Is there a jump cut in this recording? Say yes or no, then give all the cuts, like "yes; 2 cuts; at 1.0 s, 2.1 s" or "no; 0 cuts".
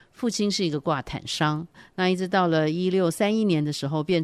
no; 0 cuts